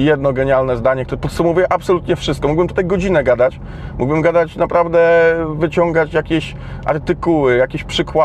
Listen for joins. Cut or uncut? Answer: uncut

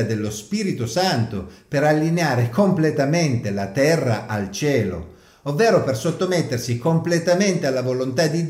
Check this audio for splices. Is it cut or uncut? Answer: uncut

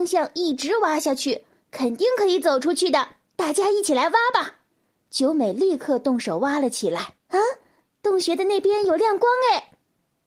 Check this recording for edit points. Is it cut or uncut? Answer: cut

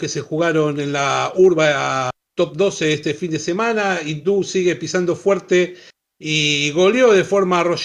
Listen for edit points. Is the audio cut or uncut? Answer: uncut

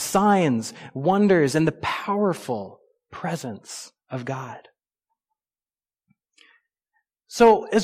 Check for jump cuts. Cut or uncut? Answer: uncut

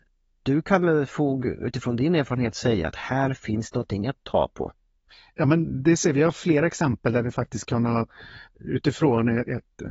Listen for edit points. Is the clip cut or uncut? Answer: uncut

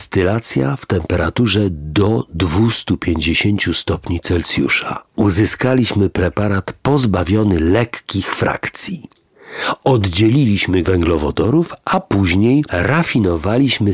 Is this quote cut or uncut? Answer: cut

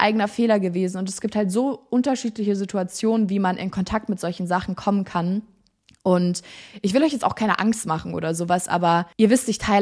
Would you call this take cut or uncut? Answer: uncut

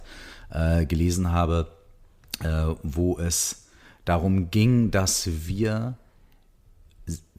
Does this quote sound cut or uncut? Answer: uncut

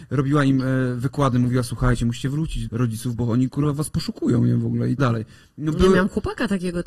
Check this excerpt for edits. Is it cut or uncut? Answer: cut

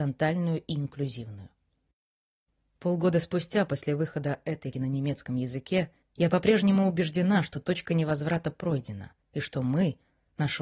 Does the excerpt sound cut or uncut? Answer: cut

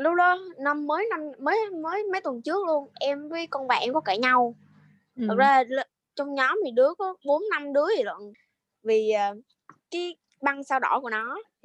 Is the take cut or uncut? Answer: uncut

